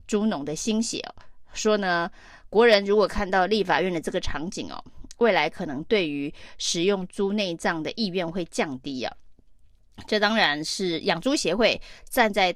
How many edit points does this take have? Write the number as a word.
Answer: zero